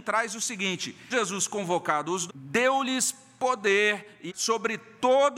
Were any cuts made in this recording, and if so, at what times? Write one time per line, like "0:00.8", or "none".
0:01.1
0:02.3
0:04.3

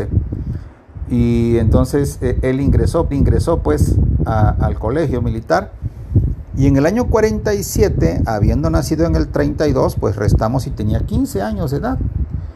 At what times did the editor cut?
0:03.1

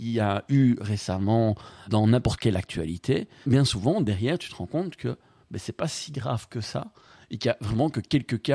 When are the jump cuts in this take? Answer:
0:01.9
0:03.4

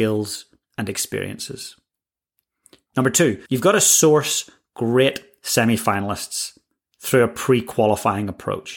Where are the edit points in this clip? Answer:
0:03.5

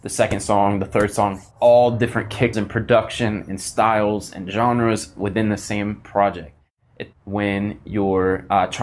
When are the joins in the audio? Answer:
0:01.5
0:02.5
0:07.1

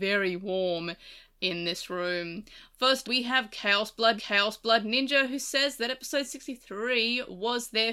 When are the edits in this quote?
0:03.0
0:04.2

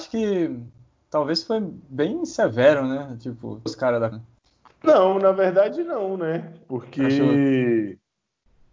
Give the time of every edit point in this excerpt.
0:03.7
0:04.1

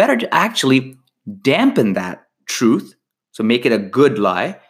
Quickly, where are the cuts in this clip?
none

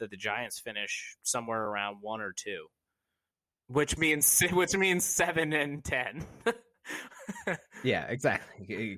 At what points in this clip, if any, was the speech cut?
none

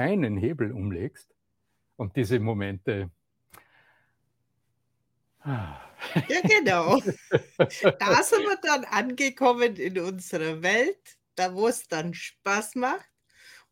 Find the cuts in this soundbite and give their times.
none

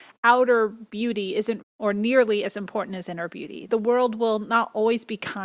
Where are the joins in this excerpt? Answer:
0:01.6
0:03.7

